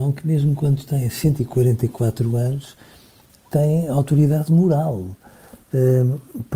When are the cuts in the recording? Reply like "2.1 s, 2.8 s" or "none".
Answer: none